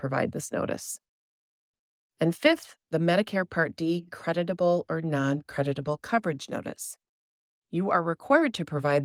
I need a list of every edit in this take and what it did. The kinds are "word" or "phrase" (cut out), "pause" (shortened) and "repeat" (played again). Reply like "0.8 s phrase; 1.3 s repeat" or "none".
none